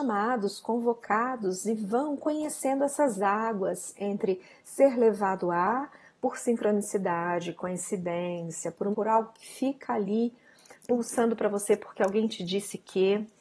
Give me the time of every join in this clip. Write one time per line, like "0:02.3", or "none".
0:08.9